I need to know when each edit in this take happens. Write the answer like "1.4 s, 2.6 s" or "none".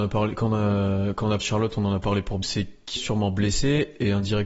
1.4 s, 2.4 s, 3.0 s